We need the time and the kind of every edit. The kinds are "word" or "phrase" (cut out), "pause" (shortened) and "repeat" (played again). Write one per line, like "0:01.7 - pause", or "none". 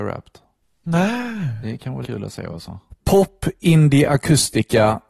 0:02.0 - word

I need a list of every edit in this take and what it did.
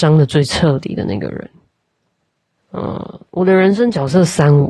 0:02.2 - pause
0:03.3 - pause

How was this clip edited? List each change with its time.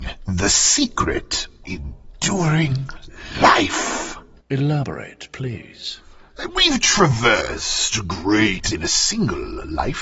0:01.6 - word
0:04.4 - pause
0:08.7 - word

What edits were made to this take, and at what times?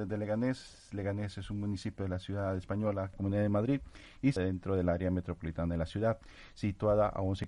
0:03.1 - phrase
0:04.4 - word

